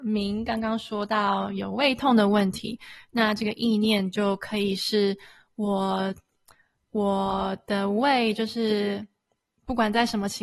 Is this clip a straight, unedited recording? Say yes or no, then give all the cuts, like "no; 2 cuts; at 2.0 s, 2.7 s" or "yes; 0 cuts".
yes; 0 cuts